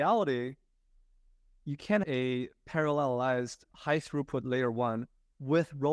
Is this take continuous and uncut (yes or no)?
no